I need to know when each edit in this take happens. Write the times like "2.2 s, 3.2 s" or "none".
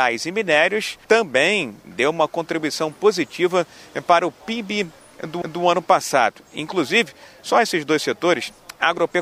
1.0 s, 5.4 s